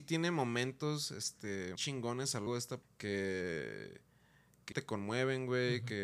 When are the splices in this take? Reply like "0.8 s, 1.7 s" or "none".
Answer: 1.8 s, 2.5 s, 2.8 s, 4.7 s

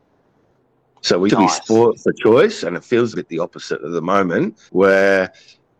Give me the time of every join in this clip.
1.3 s, 3.1 s, 4.7 s

